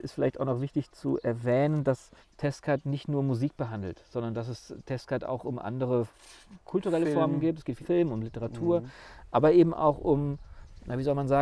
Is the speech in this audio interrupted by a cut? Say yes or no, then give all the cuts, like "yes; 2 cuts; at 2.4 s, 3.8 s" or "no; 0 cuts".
yes; 2 cuts; at 2.2 s, 7.8 s